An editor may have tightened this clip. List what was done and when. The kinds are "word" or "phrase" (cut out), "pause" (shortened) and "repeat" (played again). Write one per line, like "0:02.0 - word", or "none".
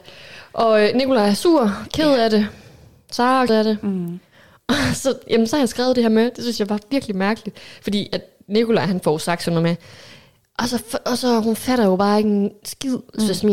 0:03.5 - word